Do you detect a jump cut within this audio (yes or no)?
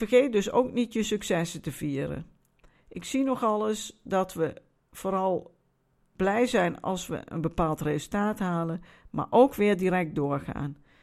no